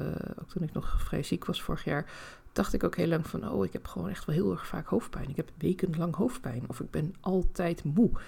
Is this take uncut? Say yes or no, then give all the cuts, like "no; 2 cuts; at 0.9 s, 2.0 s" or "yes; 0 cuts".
yes; 0 cuts